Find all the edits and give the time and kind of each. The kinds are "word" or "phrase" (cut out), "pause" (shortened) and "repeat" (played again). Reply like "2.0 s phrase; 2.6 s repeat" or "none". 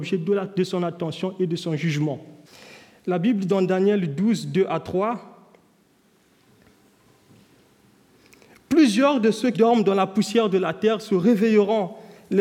2.4 s pause; 3.5 s word; 9.5 s word